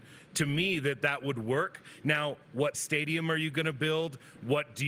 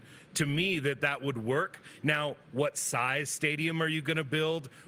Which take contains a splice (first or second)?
first